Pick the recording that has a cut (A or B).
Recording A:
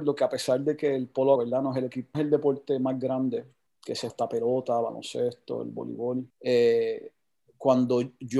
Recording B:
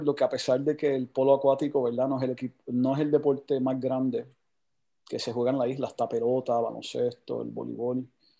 A